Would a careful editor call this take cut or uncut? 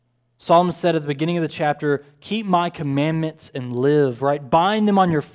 uncut